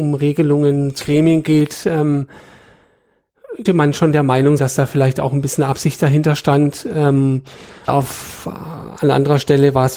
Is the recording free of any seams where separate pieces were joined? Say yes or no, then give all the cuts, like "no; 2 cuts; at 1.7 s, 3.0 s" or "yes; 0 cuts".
no; 4 cuts; at 1.0 s, 3.7 s, 4.6 s, 7.9 s